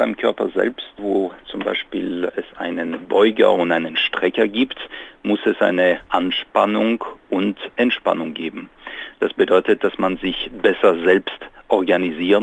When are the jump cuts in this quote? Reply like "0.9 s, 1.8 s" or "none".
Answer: 6.1 s